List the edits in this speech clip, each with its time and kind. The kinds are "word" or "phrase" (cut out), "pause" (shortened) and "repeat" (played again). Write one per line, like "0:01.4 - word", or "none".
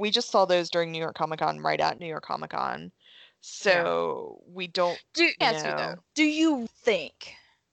0:05.4 - word
0:06.1 - pause
0:06.7 - word